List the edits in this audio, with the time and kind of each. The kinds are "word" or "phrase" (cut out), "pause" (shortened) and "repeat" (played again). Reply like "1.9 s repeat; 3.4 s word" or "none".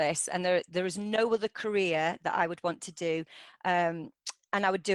none